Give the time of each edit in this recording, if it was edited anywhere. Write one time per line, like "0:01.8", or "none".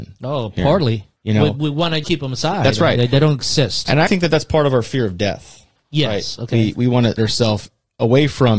0:01.2
0:02.0
0:04.1
0:07.2